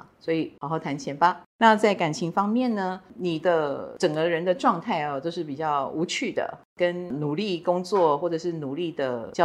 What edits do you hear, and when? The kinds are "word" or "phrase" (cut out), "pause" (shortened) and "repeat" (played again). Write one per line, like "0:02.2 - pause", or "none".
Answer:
0:01.5 - pause